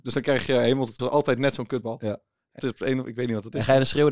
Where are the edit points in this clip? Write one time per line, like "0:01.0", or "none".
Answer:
0:01.0
0:02.6